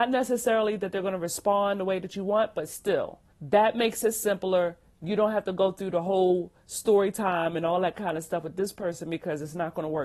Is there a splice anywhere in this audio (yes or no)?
yes